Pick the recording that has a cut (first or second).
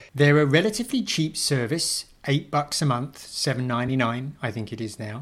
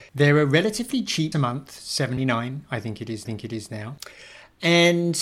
second